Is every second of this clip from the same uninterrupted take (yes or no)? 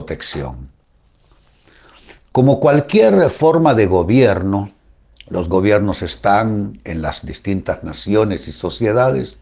yes